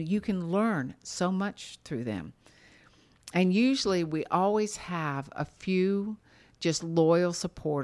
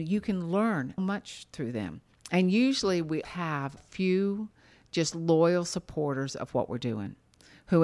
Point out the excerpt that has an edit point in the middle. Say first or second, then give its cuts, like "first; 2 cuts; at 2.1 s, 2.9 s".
second; 4 cuts; at 1.0 s, 2.1 s, 3.2 s, 3.8 s